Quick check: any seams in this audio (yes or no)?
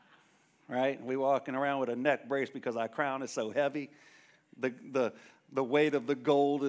no